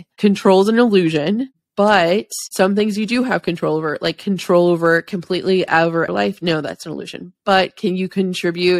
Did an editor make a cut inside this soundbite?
yes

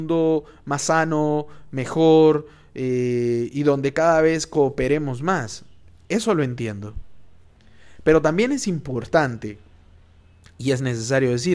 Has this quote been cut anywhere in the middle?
no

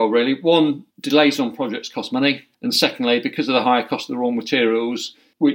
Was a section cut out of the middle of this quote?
yes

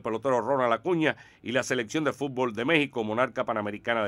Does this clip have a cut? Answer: no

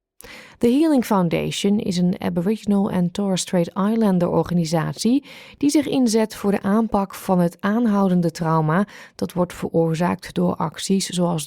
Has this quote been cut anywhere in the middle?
no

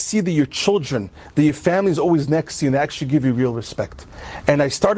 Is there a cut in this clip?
no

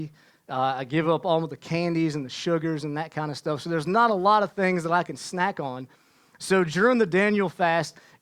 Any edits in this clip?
no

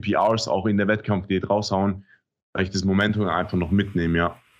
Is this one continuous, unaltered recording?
yes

